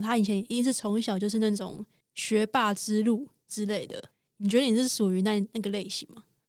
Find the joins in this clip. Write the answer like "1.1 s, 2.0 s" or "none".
2.0 s, 4.1 s